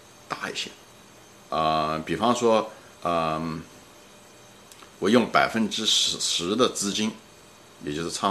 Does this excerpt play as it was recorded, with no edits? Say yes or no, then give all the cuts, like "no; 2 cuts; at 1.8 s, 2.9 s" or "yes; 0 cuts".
no; 2 cuts; at 1.0 s, 2.9 s